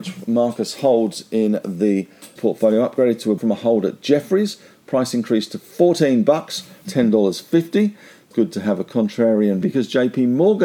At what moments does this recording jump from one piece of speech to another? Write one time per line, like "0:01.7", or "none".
0:02.4
0:03.4
0:06.8
0:08.3
0:09.6

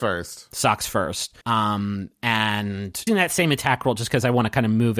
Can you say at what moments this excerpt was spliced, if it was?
0:01.4
0:03.1

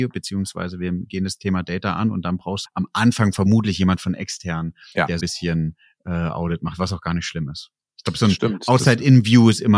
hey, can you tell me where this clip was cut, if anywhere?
0:02.7
0:05.2

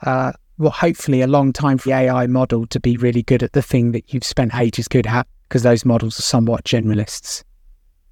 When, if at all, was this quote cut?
0:01.9
0:03.0
0:04.9
0:06.2

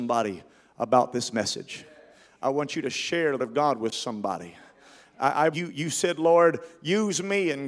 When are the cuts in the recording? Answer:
0:03.4
0:05.5

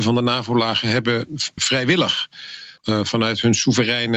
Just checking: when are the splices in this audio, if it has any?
0:01.6
0:02.8

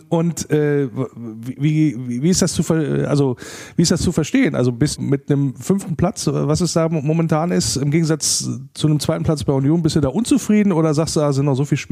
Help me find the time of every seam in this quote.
0:05.0

